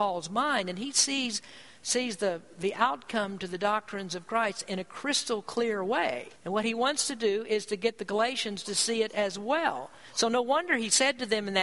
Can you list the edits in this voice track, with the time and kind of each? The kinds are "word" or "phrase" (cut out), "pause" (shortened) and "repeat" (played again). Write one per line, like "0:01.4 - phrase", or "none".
0:06.4 - pause